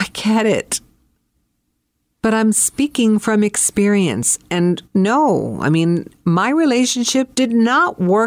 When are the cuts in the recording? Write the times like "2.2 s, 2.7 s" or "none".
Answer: 4.8 s, 7.3 s